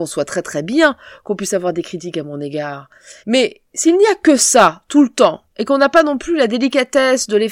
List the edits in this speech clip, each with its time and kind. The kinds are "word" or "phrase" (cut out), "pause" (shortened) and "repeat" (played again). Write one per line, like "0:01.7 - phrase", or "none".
0:03.2 - pause